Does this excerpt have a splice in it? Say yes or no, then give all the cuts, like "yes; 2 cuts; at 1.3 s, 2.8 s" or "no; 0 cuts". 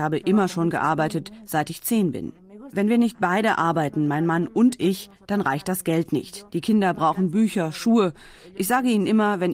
no; 0 cuts